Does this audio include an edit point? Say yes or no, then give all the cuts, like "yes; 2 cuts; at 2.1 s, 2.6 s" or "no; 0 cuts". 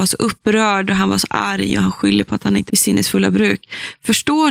yes; 1 cut; at 2.7 s